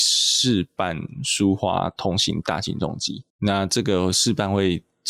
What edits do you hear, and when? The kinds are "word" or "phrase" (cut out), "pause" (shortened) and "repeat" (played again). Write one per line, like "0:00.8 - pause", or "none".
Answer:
0:03.3 - pause

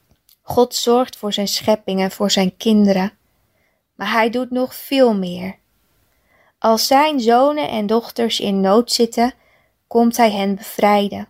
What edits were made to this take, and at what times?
none

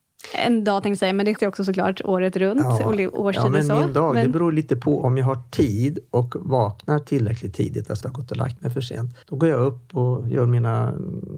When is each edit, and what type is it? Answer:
0:01.4 - word
0:08.0 - word
0:09.2 - pause

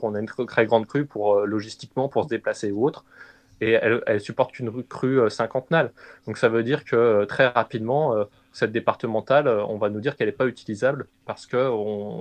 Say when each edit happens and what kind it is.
none

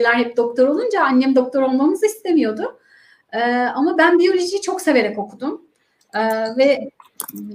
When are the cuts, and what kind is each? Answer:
none

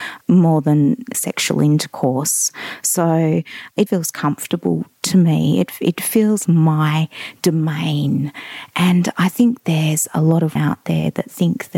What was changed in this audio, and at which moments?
0:01.1 - word
0:03.9 - word
0:06.5 - word
0:10.6 - word

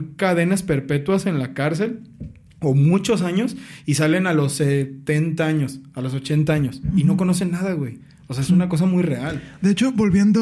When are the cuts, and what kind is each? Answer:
none

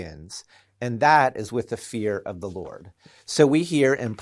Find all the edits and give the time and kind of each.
none

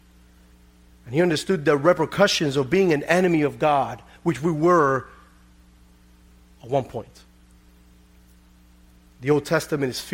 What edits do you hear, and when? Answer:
none

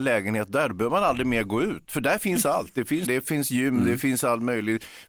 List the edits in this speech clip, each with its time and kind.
0:03.1 - word

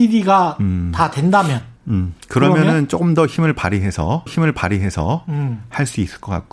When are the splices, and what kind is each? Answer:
0:01.8 - pause
0:04.3 - repeat

